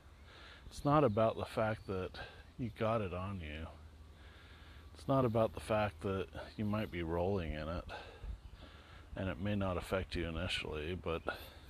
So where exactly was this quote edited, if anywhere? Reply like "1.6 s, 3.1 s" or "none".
none

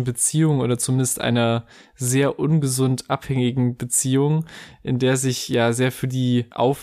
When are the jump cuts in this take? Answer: none

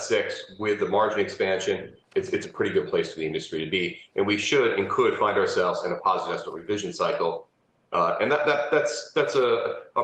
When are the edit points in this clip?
none

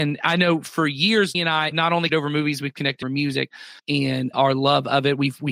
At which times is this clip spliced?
1.3 s, 1.7 s, 2.1 s, 3.0 s, 3.8 s, 4.3 s

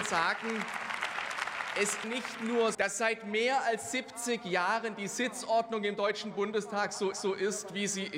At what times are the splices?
2.0 s, 2.7 s, 7.1 s

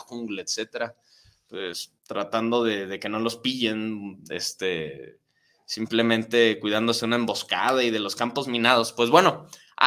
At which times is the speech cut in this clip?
2.0 s

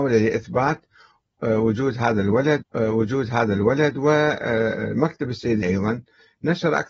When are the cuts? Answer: 2.6 s, 5.6 s

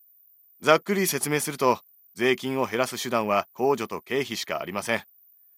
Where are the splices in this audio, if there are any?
3.5 s

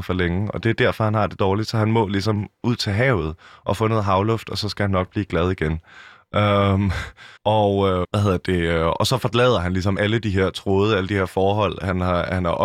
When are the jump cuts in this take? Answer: 7.4 s, 8.0 s, 10.0 s

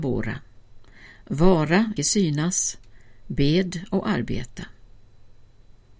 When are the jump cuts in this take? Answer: 2.0 s

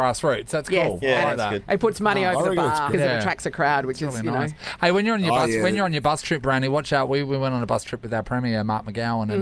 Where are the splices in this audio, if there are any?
2.9 s

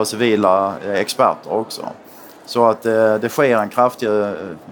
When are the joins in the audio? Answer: none

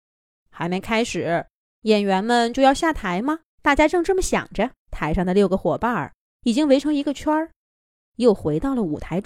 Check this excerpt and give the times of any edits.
3.5 s, 4.8 s

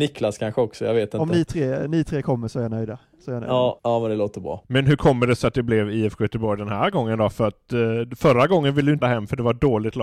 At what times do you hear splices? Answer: 9.0 s

